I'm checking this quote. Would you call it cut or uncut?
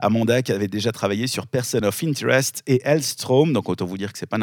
uncut